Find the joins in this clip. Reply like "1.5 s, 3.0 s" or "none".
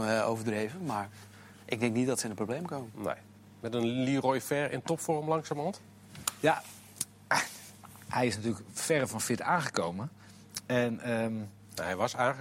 none